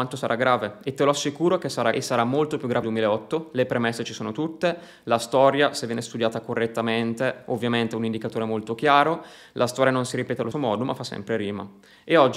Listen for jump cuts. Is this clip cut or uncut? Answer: cut